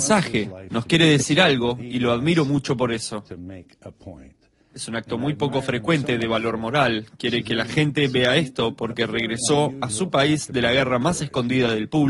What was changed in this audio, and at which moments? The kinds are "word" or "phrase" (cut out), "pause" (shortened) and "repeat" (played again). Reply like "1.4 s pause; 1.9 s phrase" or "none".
none